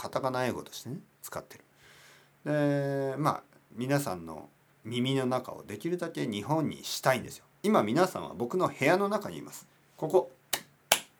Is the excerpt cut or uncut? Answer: uncut